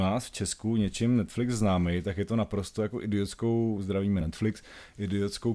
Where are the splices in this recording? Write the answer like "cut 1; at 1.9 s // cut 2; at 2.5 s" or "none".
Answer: none